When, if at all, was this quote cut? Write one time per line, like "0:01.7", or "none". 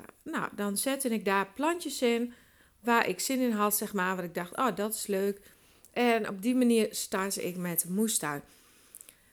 none